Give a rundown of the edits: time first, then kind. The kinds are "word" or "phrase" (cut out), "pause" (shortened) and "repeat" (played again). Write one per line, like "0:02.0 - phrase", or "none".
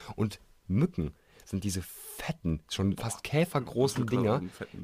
none

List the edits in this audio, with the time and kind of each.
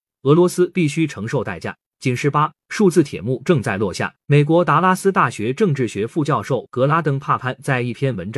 0:01.9 - pause
0:04.2 - pause

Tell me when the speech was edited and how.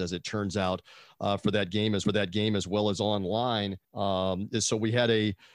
0:02.0 - repeat
0:03.8 - pause

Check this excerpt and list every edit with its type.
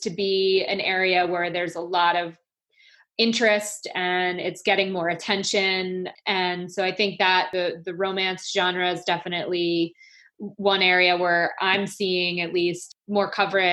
none

